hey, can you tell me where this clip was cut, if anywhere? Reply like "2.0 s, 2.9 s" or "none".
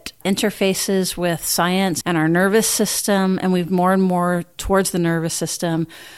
2.0 s, 3.7 s